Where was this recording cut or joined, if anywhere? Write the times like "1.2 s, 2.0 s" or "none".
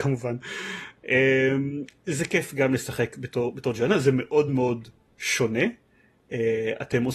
none

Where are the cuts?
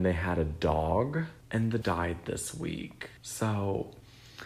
1.4 s, 1.8 s, 3.2 s

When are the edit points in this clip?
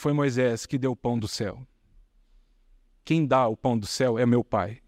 none

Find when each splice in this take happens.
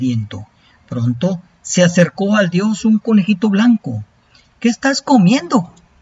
none

